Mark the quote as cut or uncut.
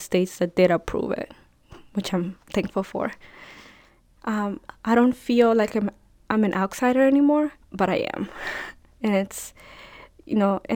cut